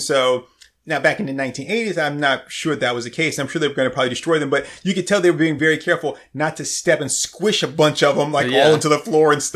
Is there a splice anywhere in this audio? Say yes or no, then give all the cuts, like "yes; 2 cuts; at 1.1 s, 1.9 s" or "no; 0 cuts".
no; 0 cuts